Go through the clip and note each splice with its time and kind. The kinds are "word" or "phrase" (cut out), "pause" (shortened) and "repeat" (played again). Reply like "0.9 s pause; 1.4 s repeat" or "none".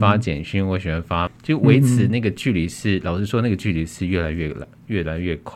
1.3 s word